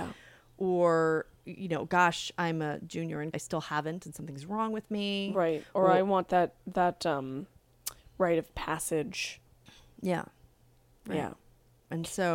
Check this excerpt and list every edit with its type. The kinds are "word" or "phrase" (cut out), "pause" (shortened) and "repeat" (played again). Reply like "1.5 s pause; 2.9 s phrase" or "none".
3.3 s phrase